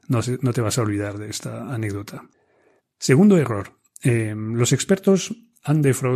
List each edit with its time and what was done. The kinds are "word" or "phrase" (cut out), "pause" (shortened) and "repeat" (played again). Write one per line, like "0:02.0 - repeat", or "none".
0:02.8 - pause